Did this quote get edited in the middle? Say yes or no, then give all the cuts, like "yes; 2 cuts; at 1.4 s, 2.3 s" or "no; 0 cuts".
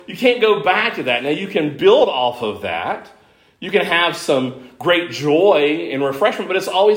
no; 0 cuts